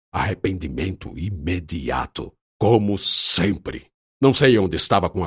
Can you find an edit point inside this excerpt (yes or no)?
yes